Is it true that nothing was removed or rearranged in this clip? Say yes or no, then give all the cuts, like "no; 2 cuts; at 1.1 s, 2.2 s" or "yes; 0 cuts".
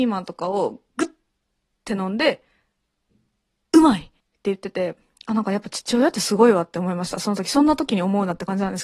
no; 1 cut; at 4.2 s